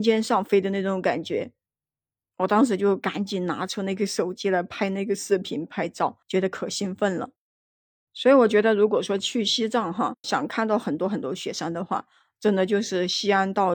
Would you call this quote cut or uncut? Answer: cut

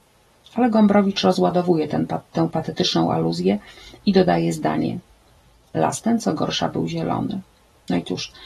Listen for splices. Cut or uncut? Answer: uncut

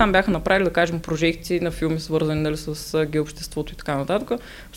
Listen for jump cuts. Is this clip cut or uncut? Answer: uncut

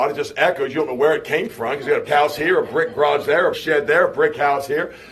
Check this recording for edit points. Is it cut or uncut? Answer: cut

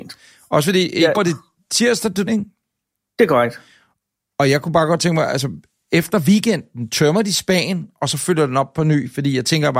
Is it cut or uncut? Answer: cut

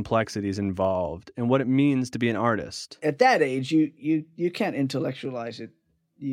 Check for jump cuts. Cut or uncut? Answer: uncut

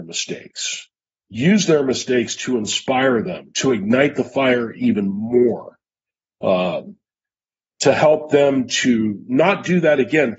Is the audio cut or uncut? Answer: uncut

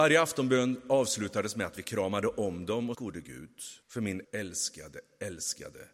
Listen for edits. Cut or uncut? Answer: cut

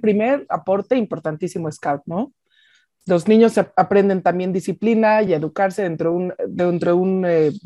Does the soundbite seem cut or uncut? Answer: uncut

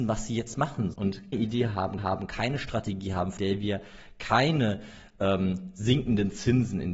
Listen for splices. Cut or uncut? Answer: cut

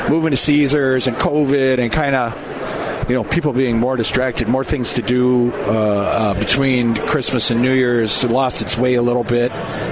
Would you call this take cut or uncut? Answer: uncut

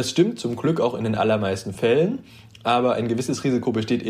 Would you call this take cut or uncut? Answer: uncut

